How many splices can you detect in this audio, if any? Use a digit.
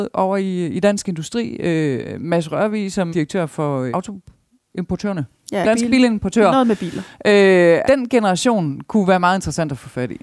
4